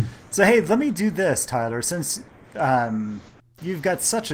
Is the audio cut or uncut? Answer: uncut